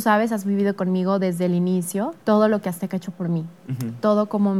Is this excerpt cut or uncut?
cut